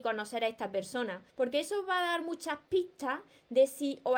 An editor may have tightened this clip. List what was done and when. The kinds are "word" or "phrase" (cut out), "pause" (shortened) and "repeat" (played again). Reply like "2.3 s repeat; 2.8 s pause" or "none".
1.3 s pause